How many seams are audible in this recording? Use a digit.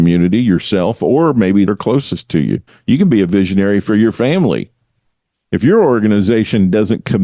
2